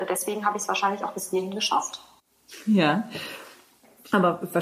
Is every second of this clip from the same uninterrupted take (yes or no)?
yes